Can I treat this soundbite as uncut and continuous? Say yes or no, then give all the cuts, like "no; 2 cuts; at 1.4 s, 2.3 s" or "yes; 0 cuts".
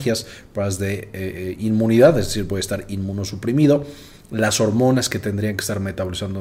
yes; 0 cuts